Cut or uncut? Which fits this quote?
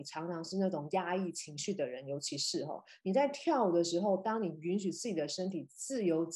uncut